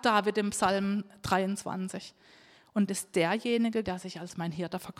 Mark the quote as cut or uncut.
cut